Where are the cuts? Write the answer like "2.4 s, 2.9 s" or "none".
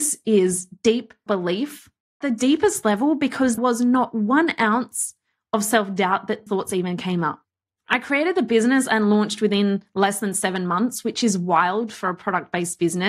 1.3 s, 2.2 s, 3.6 s, 6.5 s